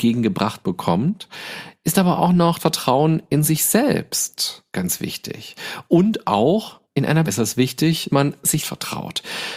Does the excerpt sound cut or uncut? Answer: cut